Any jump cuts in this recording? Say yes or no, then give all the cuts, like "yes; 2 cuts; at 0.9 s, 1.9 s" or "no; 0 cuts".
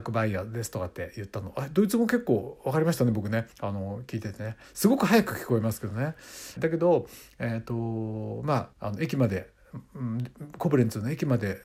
yes; 3 cuts; at 3.5 s, 6.6 s, 8.7 s